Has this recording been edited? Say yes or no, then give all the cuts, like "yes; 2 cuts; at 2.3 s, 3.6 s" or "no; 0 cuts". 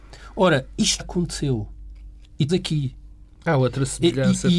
yes; 3 cuts; at 1.0 s, 2.5 s, 3.3 s